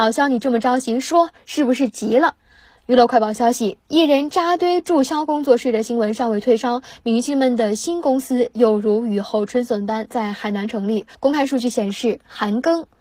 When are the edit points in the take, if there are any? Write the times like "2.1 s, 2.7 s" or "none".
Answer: 2.4 s, 11.1 s